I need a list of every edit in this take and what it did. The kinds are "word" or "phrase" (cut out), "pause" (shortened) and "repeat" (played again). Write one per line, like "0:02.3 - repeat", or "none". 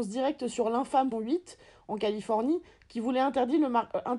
0:01.1 - word